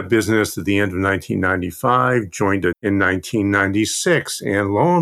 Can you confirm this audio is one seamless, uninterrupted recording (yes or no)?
no